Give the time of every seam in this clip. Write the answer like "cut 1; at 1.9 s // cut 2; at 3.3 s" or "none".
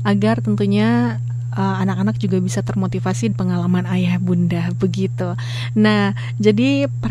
cut 1; at 3.3 s